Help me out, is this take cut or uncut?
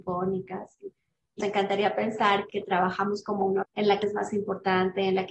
cut